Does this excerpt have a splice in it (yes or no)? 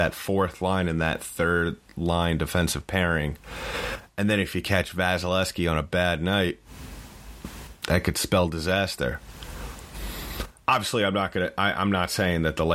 no